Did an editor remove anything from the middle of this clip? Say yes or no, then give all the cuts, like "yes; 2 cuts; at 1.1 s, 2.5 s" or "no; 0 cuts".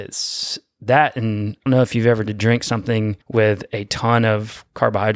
yes; 3 cuts; at 1.7 s, 2.3 s, 3.2 s